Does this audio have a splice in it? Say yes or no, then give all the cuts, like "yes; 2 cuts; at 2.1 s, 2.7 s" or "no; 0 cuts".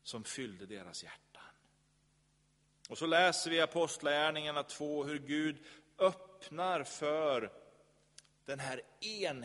no; 0 cuts